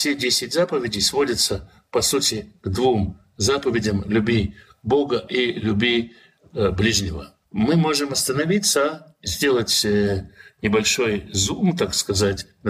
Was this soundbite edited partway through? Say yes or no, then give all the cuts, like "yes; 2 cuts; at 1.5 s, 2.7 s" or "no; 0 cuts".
no; 0 cuts